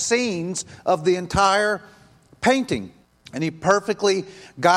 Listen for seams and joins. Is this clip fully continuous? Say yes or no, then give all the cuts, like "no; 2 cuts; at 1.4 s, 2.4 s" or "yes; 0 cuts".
no; 1 cut; at 3.0 s